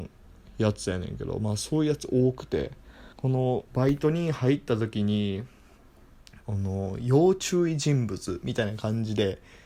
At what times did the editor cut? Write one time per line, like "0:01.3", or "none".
0:03.1
0:03.7
0:06.4